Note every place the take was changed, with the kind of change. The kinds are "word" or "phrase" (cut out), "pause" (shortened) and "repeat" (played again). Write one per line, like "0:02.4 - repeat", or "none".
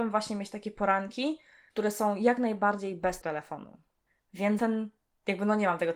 0:03.2 - word
0:04.6 - word